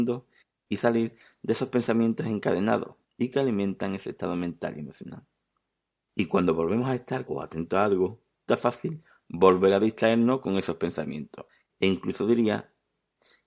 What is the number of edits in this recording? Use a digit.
3